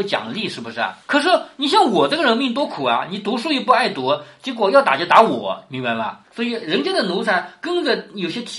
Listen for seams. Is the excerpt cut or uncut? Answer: cut